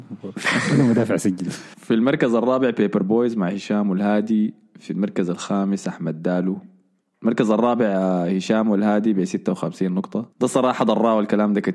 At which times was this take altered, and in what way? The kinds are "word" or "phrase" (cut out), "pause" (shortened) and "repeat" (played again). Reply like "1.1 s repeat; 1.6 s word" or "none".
10.3 s pause